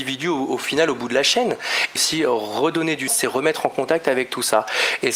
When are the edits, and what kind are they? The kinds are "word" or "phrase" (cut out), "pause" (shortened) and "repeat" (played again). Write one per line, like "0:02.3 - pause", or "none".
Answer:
0:02.0 - phrase
0:03.1 - word

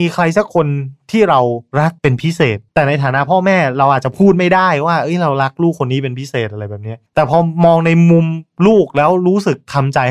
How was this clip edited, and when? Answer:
0:02.0 - pause
0:02.7 - pause
0:07.1 - pause

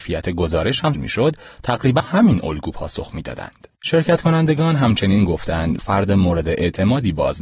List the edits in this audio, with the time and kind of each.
0:00.9 - word
0:02.0 - word
0:03.7 - pause
0:05.8 - phrase

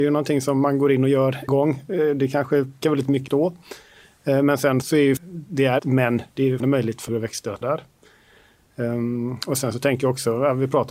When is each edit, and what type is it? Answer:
0:01.5 - word
0:02.8 - word
0:03.3 - word
0:04.8 - word
0:05.2 - word
0:05.8 - word
0:06.6 - word
0:07.1 - word
0:07.6 - word

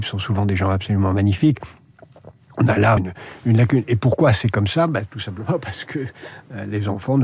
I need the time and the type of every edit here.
0:03.0 - word

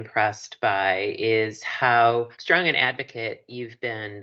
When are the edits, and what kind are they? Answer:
0:02.3 - pause

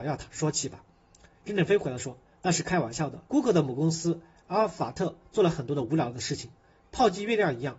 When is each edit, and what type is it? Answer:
0:03.3 - pause

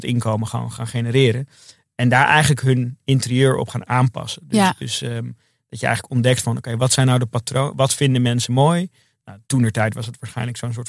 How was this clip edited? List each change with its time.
0:09.4 - pause

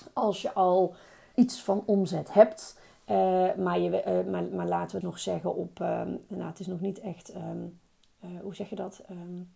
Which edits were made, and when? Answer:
0:01.3 - word
0:05.0 - phrase

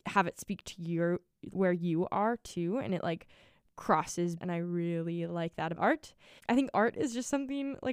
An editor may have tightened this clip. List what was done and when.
0:01.5 - word
0:04.4 - word
0:05.7 - word
0:06.4 - word
0:06.7 - word

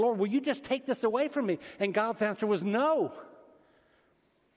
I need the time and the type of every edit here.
none

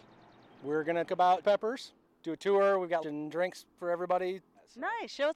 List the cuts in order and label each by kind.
0:01.1 - word
0:01.4 - word
0:03.0 - word

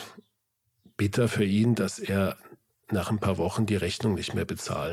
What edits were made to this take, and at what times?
none

